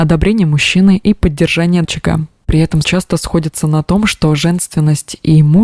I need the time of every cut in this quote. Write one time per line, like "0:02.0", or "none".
0:01.8
0:02.8